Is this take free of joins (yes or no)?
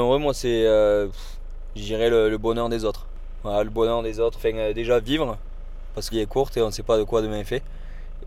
no